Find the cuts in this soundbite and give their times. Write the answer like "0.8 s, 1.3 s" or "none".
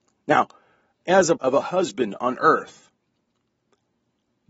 1.4 s